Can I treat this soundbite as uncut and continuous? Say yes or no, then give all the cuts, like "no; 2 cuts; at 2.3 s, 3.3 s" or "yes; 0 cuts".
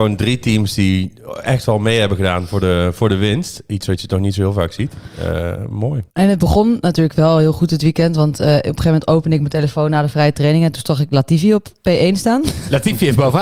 no; 1 cut; at 6.1 s